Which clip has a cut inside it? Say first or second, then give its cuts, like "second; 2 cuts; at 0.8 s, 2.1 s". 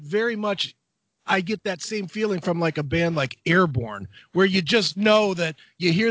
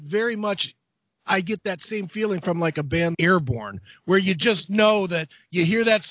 second; 1 cut; at 3.1 s